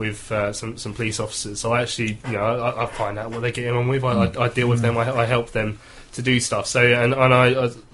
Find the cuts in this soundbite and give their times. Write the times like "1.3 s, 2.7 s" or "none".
none